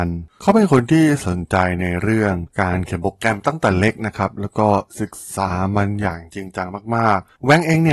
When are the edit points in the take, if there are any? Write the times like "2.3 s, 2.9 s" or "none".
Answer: 2.5 s